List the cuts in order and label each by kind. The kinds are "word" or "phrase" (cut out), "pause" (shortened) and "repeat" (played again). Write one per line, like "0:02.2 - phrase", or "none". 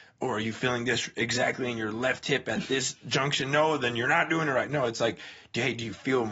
none